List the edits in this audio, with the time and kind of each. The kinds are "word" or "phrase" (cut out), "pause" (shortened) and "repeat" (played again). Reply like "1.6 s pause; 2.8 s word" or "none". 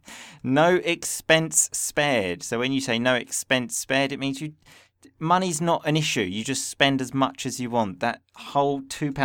none